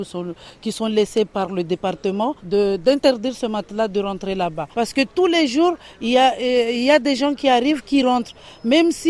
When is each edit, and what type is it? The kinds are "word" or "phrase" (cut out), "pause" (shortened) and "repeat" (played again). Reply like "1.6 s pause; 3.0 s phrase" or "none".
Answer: 2.4 s pause; 4.7 s pause